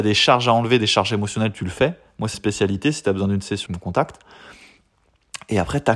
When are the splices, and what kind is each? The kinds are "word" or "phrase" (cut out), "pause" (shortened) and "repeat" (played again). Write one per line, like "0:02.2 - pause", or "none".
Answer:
0:02.3 - phrase
0:03.7 - word

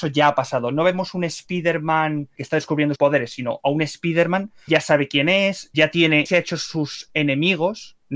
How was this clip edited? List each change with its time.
0:02.4 - word
0:03.0 - word
0:04.7 - word
0:05.7 - word
0:06.3 - word

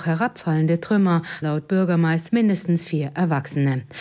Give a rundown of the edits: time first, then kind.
0:01.4 - word
0:02.3 - phrase

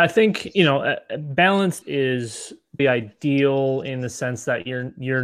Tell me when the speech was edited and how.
0:01.8 - word
0:02.8 - word

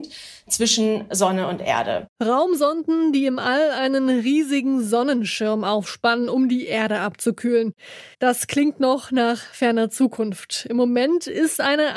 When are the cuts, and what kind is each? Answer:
0:02.1 - pause
0:08.1 - pause

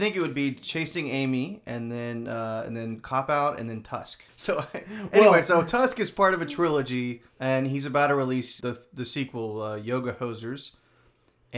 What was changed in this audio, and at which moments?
0:04.3 - pause
0:07.3 - pause
0:08.6 - phrase

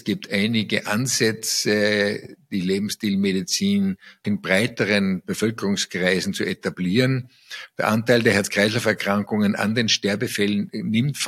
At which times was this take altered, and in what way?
0:04.2 - word

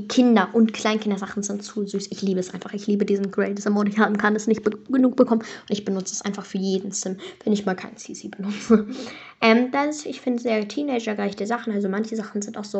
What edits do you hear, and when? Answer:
none

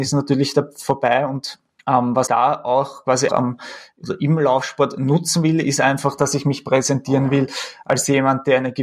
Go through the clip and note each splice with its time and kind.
0:01.8 - pause
0:02.3 - word
0:03.3 - word

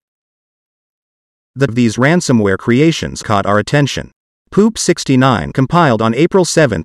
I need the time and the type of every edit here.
0:01.7 - word
0:03.2 - word
0:05.5 - word

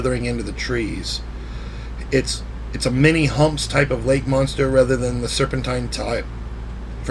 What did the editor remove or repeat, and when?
none

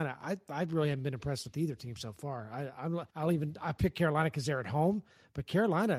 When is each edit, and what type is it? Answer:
0:03.1 - pause

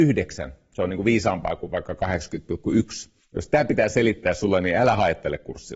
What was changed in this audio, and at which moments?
0:03.2 - pause

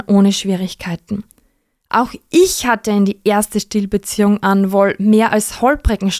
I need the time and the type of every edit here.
none

